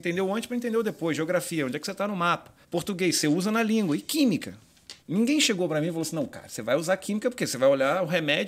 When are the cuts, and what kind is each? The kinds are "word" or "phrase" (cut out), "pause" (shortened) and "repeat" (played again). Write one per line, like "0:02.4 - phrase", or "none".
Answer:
0:02.6 - pause
0:05.0 - pause